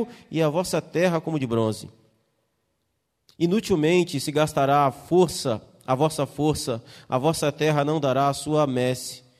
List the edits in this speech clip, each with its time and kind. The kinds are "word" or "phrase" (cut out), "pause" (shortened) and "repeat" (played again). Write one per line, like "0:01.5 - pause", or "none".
none

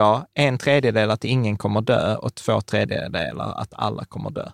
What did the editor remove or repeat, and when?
none

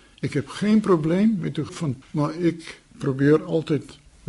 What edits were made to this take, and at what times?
0:01.7 - word
0:02.0 - word

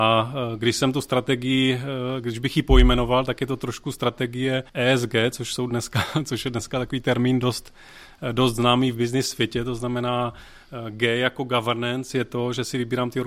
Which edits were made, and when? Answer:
0:04.7 - pause

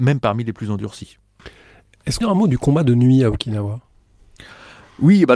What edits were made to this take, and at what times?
0:02.2 - phrase

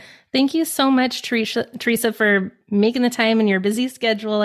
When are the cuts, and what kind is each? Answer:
none

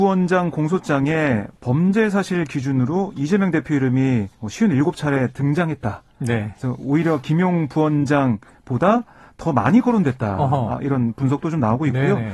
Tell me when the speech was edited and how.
0:04.3 - pause

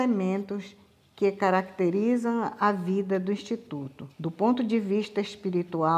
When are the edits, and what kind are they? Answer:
0:04.1 - pause

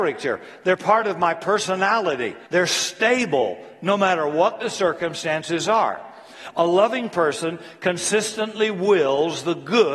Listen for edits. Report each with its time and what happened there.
0:02.5 - pause

